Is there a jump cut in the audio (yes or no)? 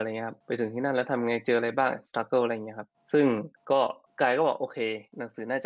no